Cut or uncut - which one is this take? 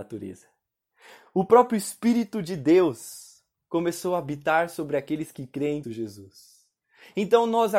cut